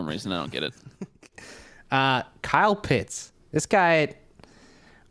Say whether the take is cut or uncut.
cut